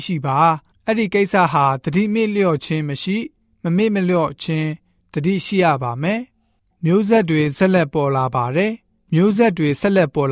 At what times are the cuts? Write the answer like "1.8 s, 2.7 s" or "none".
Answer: none